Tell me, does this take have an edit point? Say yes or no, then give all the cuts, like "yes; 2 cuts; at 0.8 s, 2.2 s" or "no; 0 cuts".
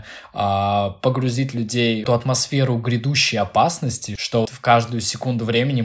yes; 2 cuts; at 2.1 s, 4.5 s